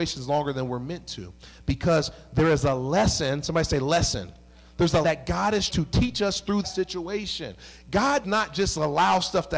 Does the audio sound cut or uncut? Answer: cut